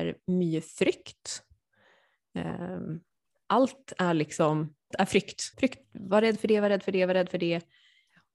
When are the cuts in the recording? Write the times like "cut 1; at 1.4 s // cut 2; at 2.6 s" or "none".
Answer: cut 1; at 4.9 s // cut 2; at 5.5 s

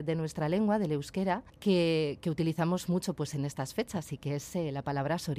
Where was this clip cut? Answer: cut 1; at 1.5 s

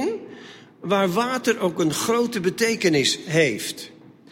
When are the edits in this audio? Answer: none

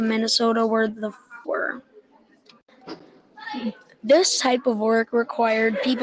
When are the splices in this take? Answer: cut 1; at 1.4 s

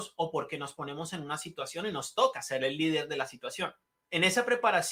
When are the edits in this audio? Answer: cut 1; at 3.8 s

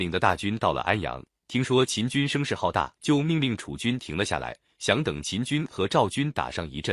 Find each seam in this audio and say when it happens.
cut 1; at 3.0 s

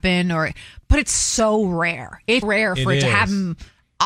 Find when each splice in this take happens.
cut 1; at 2.4 s

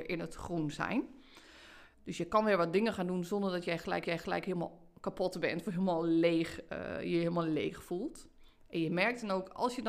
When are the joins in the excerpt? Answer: cut 1; at 1.9 s // cut 2; at 4.0 s

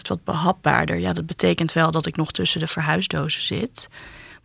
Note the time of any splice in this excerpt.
none

